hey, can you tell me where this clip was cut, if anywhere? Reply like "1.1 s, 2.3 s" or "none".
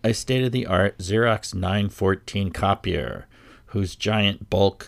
none